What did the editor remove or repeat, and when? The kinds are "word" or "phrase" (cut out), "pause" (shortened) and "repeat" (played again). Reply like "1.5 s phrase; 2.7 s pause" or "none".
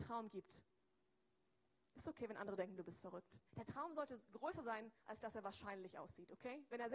3.5 s pause; 5.0 s pause